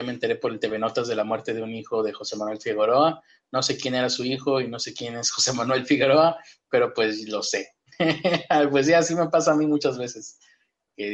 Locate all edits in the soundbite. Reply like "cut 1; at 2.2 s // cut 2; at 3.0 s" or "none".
none